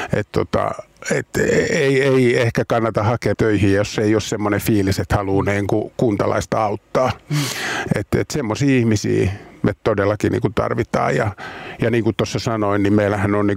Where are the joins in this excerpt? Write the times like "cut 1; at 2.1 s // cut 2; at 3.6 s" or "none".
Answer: cut 1; at 3.3 s